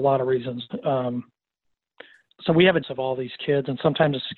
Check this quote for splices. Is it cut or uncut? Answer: cut